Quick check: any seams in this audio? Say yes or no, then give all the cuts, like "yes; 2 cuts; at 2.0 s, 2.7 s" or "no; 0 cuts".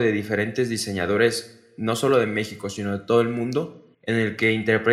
yes; 1 cut; at 3.9 s